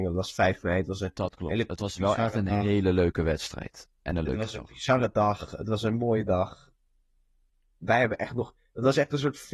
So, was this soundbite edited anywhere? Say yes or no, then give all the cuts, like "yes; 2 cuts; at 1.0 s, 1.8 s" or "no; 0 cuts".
no; 0 cuts